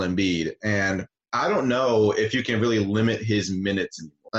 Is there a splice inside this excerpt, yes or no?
no